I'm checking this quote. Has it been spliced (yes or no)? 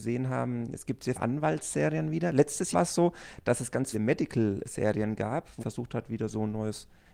yes